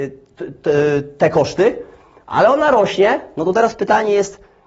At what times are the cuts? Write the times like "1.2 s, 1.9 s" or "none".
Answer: none